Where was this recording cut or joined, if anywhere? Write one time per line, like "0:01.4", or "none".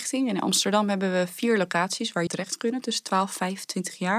0:02.3

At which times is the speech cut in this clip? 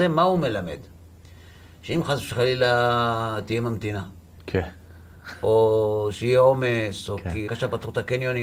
0:07.5

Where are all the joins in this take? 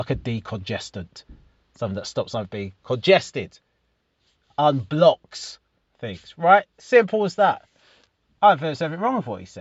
none

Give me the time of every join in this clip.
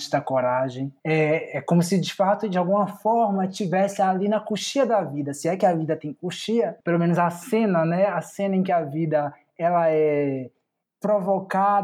0:01.0
0:06.8

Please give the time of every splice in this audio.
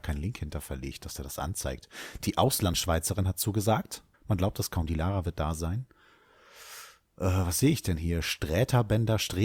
0:04.1

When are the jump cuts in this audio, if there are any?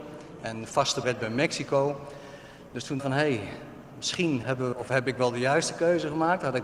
0:01.0
0:03.0
0:04.4
0:04.7

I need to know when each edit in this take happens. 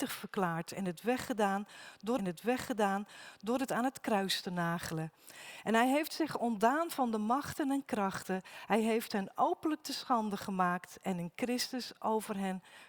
0:02.2

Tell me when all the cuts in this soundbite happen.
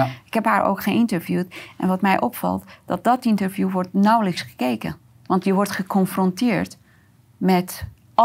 none

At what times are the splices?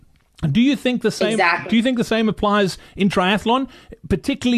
none

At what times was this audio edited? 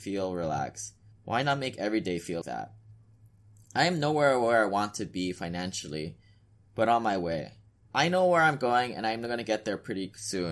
0:01.1
0:02.4

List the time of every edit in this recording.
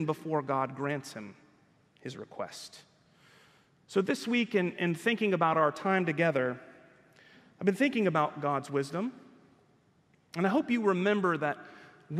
none

